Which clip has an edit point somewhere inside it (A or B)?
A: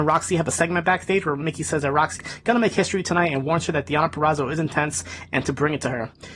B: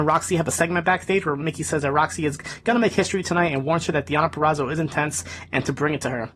A